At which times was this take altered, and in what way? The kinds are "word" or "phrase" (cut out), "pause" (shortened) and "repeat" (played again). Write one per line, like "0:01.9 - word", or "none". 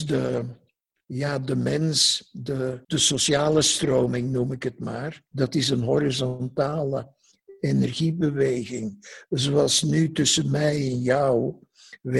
0:02.8 - pause
0:05.3 - pause